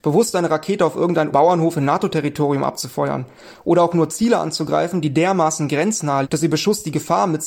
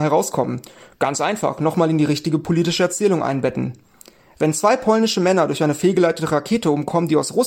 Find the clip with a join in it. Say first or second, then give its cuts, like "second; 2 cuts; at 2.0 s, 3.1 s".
first; 2 cuts; at 1.3 s, 6.2 s